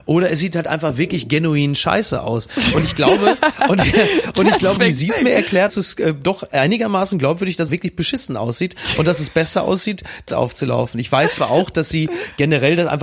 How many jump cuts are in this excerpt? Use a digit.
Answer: 4